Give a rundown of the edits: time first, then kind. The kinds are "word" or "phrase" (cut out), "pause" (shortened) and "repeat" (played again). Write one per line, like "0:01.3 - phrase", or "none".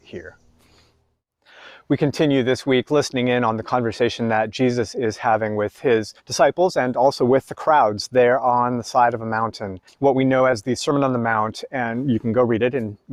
0:06.2 - pause
0:09.9 - pause